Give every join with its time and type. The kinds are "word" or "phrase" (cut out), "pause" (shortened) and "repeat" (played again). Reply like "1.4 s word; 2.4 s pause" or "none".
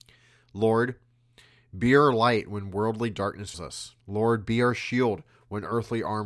3.5 s word; 4.0 s pause